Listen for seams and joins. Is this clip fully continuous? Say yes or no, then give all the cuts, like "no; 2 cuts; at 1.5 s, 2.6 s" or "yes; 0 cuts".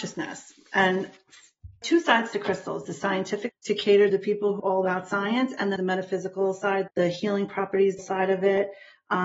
no; 8 cuts; at 1.8 s, 2.8 s, 3.5 s, 4.1 s, 4.6 s, 5.8 s, 6.9 s, 8.0 s